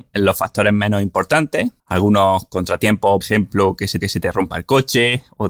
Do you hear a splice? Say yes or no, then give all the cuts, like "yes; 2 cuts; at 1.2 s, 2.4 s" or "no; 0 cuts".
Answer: yes; 3 cuts; at 1.8 s, 3.2 s, 4.0 s